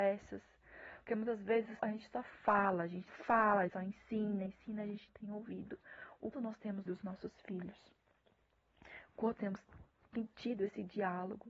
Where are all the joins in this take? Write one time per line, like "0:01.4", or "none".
0:01.1
0:01.8
0:03.1
0:03.7
0:04.5
0:05.1
0:06.3
0:06.9
0:09.4